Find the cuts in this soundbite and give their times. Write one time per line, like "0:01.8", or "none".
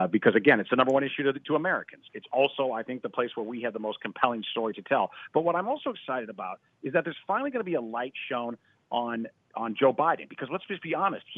none